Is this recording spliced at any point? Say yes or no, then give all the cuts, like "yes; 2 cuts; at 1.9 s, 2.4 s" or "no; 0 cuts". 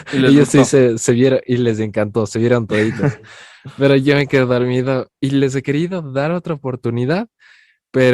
no; 0 cuts